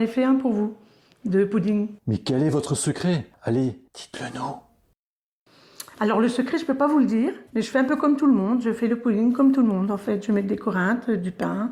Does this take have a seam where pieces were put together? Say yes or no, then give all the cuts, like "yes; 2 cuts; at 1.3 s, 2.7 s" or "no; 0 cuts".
yes; 3 cuts; at 2.0 s, 3.9 s, 7.5 s